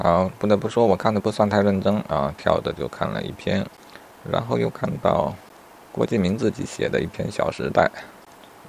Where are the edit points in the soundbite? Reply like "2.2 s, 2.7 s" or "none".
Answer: none